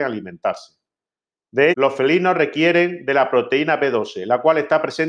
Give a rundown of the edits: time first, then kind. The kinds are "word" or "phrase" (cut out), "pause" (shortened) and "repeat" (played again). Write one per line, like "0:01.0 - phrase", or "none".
0:01.7 - word